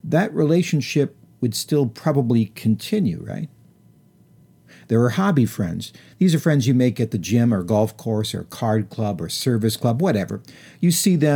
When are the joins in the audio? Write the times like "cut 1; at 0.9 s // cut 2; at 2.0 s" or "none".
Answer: none